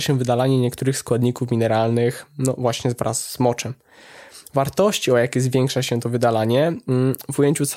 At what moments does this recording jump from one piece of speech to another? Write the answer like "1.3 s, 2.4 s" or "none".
none